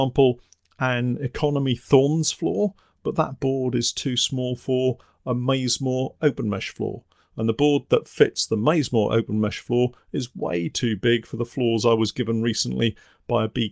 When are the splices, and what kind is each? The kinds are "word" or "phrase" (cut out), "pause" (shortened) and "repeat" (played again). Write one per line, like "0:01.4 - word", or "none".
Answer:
none